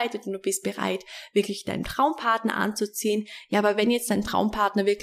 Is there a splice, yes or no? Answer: no